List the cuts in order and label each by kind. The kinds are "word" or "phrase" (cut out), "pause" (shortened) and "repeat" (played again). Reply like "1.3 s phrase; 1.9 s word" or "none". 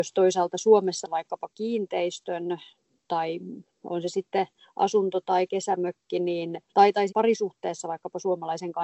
1.0 s word; 3.1 s word; 6.7 s pause; 7.1 s phrase